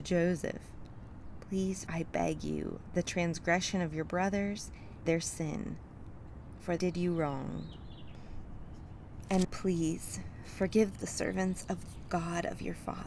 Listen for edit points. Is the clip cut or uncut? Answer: cut